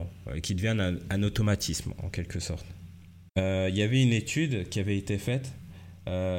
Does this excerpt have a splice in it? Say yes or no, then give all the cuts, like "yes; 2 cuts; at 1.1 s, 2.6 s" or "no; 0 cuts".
yes; 1 cut; at 3.3 s